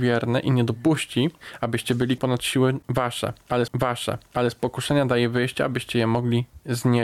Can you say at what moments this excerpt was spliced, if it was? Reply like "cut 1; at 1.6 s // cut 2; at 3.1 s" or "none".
cut 1; at 2.2 s // cut 2; at 3.7 s